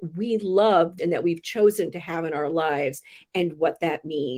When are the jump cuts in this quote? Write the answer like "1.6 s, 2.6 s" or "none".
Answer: 1.0 s